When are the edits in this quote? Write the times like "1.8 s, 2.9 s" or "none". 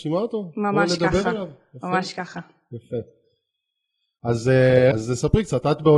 4.9 s